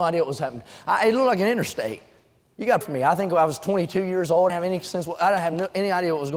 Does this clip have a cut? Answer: yes; 2 cuts; at 2.8 s, 4.5 s

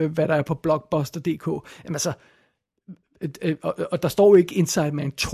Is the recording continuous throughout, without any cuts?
yes; 0 cuts

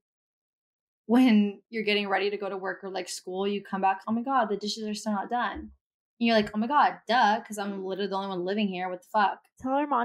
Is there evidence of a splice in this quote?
yes; 1 cut; at 4.0 s

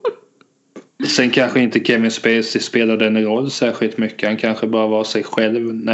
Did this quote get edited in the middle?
no; 0 cuts

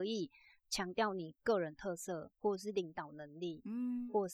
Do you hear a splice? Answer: yes; 1 cut; at 2.4 s

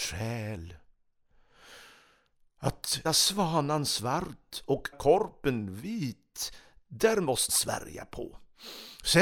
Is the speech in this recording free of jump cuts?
no; 3 cuts; at 3.0 s, 4.9 s, 7.5 s

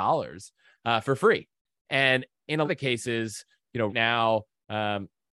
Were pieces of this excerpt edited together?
yes; 2 cuts; at 2.6 s, 3.9 s

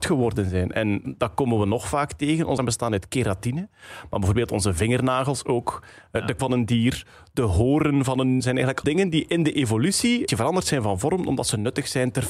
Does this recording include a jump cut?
yes; 6 cuts; at 1.0 s, 2.6 s, 6.4 s, 8.4 s, 8.8 s, 10.3 s

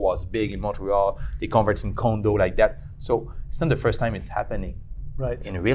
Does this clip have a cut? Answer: no; 0 cuts

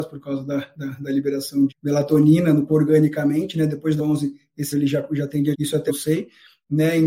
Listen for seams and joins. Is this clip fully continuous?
no; 6 cuts; at 1.7 s, 2.7 s, 4.0 s, 4.7 s, 5.5 s, 5.9 s

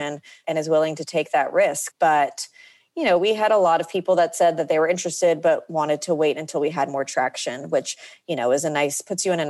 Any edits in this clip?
no; 0 cuts

